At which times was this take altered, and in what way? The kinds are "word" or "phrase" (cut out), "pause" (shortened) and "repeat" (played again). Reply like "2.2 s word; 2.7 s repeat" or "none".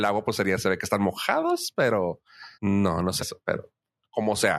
2.5 s pause; 3.2 s word